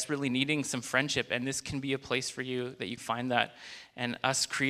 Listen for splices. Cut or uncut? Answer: cut